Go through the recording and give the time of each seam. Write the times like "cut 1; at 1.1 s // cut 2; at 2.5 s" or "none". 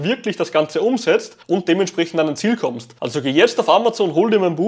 cut 1; at 1.4 s // cut 2; at 3.0 s

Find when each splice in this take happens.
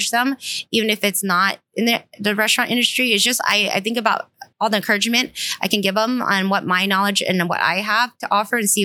cut 1; at 4.5 s

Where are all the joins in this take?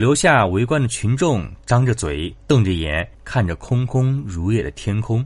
cut 1; at 3.1 s

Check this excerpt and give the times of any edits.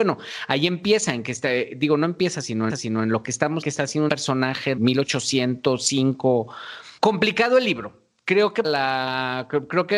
cut 1; at 2.7 s // cut 2; at 3.6 s // cut 3; at 4.1 s // cut 4; at 4.8 s // cut 5; at 7.0 s // cut 6; at 8.6 s

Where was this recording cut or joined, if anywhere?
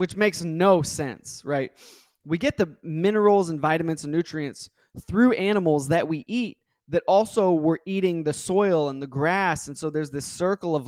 none

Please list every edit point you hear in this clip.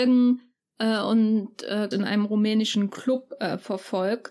cut 1; at 1.9 s

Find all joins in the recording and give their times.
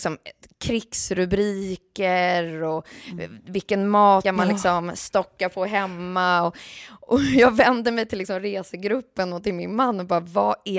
cut 1; at 4.2 s

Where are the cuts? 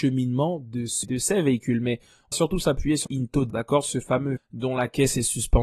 cut 1; at 1.0 s // cut 2; at 2.3 s // cut 3; at 3.1 s // cut 4; at 3.5 s // cut 5; at 4.4 s

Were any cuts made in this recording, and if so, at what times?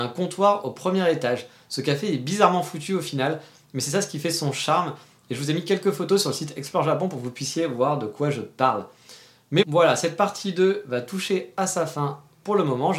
cut 1; at 9.6 s

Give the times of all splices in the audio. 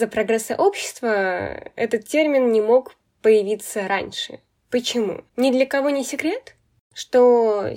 cut 1; at 5.3 s

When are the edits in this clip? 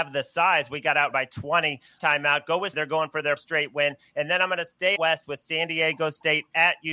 cut 1; at 1.1 s // cut 2; at 2.0 s // cut 3; at 2.7 s // cut 4; at 3.4 s // cut 5; at 5.0 s

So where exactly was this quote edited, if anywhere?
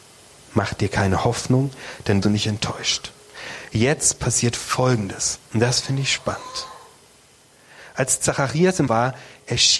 cut 1; at 2.2 s // cut 2; at 5.4 s // cut 3; at 8.9 s

